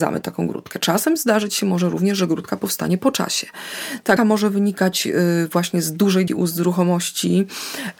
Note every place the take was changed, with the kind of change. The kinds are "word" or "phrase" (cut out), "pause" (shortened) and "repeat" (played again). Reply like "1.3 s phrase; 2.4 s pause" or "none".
4.2 s word; 6.3 s word